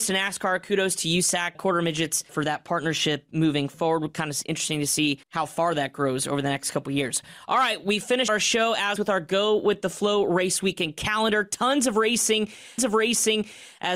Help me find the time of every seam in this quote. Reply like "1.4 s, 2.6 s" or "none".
1.5 s, 2.3 s, 5.2 s, 8.3 s, 9.0 s, 12.8 s